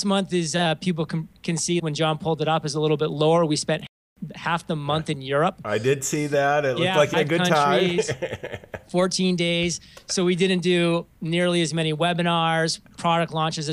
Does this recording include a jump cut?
yes; 2 cuts; at 1.8 s, 7.1 s

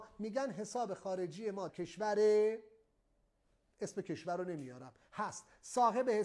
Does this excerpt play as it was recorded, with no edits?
no; 1 cut; at 1.7 s

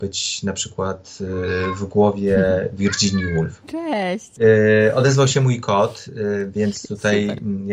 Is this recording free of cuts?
yes; 0 cuts

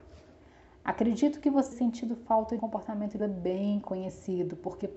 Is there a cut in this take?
yes; 3 cuts; at 1.7 s, 2.6 s, 3.2 s

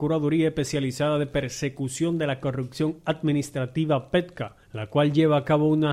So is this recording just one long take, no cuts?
no; 1 cut; at 4.6 s

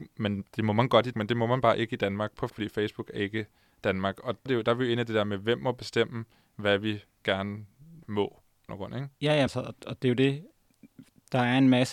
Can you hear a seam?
yes; 7 cuts; at 1.1 s, 2.5 s, 4.5 s, 8.0 s, 8.7 s, 9.5 s, 9.8 s

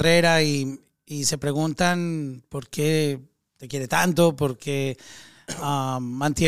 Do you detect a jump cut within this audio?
no; 0 cuts

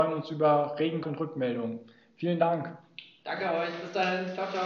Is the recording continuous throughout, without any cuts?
no; 1 cut; at 1.0 s

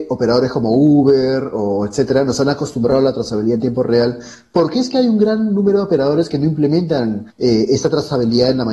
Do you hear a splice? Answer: yes; 1 cut; at 7.3 s

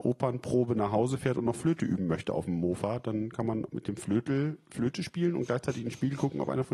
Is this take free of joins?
yes; 0 cuts

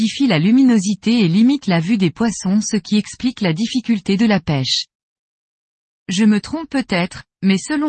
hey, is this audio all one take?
yes; 0 cuts

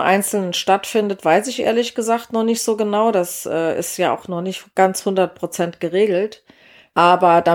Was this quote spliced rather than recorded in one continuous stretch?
no; 0 cuts

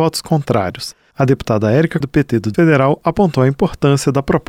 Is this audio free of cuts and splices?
no; 2 cuts; at 2.0 s, 2.5 s

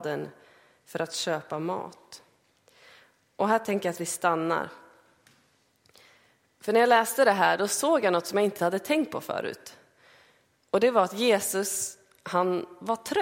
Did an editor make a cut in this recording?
yes; 1 cut; at 8.6 s

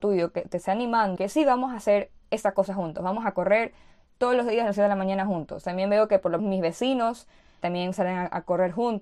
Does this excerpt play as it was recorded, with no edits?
no; 3 cuts; at 1.2 s, 6.4 s, 7.6 s

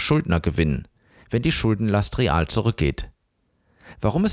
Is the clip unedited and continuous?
yes; 0 cuts

